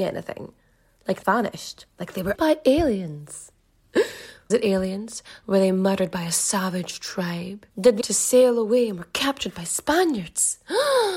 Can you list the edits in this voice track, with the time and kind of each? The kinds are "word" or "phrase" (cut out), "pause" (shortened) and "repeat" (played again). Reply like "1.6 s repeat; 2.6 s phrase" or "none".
1.2 s word; 2.3 s word; 4.5 s word; 7.7 s pause; 8.0 s word